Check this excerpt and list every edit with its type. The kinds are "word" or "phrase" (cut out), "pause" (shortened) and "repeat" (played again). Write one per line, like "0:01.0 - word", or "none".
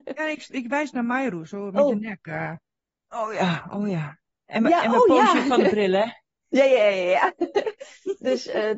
none